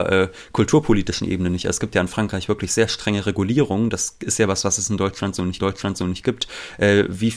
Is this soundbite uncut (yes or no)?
no